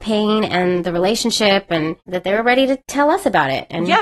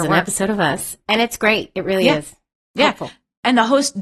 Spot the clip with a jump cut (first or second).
first